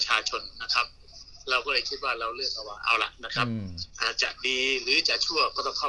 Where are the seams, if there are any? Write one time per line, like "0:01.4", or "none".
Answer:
0:03.9